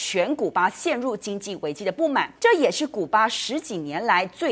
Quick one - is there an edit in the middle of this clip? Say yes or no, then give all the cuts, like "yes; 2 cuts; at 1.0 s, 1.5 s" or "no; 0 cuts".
yes; 1 cut; at 2.4 s